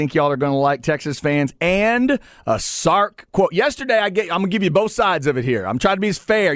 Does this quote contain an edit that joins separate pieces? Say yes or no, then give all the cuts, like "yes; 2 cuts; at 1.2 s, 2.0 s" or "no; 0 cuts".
no; 0 cuts